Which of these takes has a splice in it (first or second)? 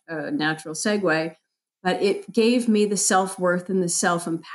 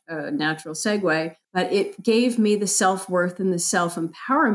second